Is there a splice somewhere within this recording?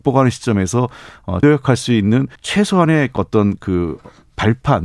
yes; 2 cuts; at 1.4 s, 2.4 s

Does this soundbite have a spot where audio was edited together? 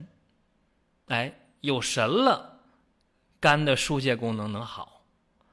no; 0 cuts

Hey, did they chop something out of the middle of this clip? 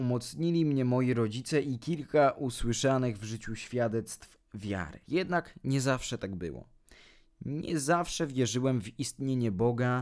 yes; 1 cut; at 5.0 s

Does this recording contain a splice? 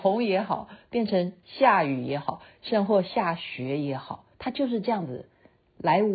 yes; 1 cut; at 4.3 s

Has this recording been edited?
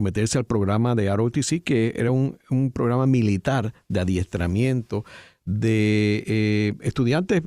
no; 0 cuts

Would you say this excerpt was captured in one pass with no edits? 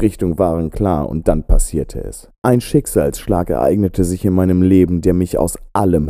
no; 1 cut; at 2.4 s

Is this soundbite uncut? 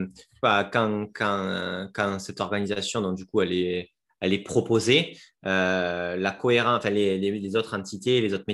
yes; 0 cuts

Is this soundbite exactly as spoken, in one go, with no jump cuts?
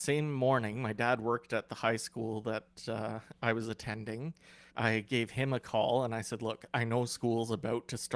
no; 1 cut; at 4.7 s

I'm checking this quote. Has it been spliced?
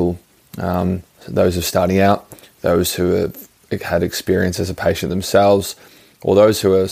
no; 0 cuts

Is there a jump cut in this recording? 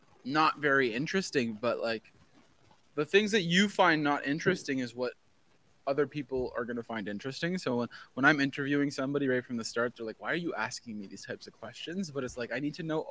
no; 0 cuts

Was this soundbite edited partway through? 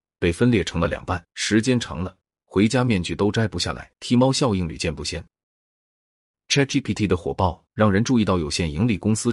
yes; 3 cuts; at 1.3 s, 4.0 s, 7.7 s

